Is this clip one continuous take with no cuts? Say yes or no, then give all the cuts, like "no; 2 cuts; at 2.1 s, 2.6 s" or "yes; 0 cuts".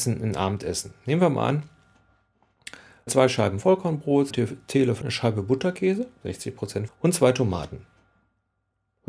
no; 4 cuts; at 3.1 s, 4.3 s, 5.0 s, 6.9 s